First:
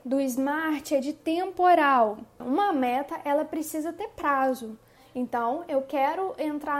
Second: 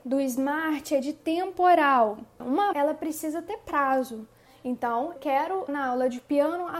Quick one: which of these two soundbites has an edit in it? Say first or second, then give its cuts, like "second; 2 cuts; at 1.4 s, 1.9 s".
second; 3 cuts; at 2.7 s, 5.2 s, 5.7 s